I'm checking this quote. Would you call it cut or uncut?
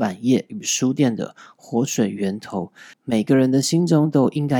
cut